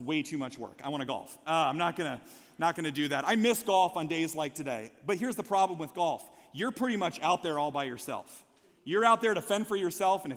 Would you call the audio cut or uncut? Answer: uncut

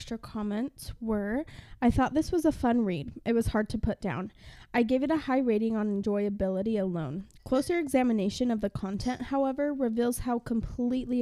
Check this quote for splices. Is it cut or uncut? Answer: uncut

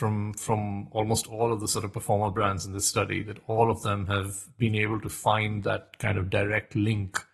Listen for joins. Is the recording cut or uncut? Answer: uncut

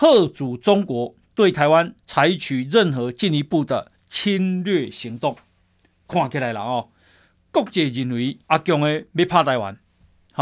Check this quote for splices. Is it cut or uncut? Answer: cut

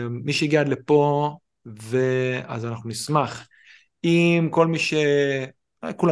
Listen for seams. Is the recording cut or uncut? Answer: uncut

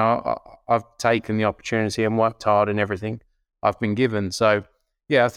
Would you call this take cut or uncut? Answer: uncut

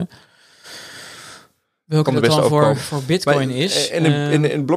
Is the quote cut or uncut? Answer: uncut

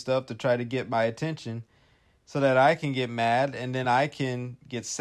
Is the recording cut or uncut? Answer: uncut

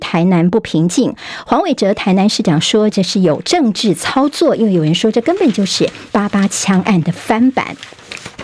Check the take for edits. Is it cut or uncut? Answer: cut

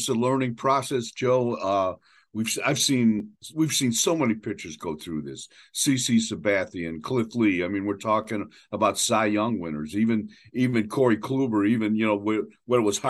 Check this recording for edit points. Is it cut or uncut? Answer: uncut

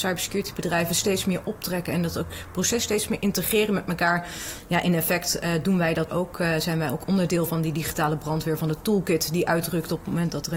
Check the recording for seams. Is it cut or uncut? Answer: cut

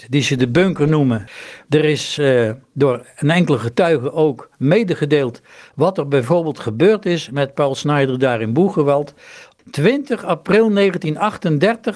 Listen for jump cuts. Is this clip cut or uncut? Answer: uncut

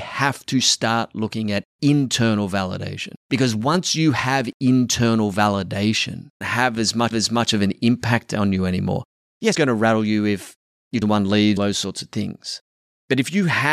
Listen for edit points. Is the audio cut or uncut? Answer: cut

